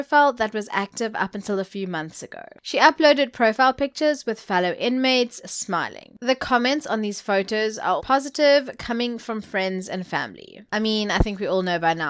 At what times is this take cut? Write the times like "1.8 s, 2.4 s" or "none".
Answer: 8.0 s